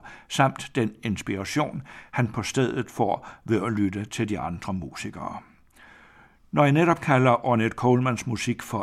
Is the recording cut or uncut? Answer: uncut